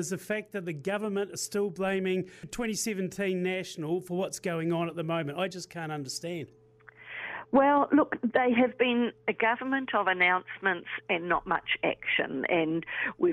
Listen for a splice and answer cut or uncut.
uncut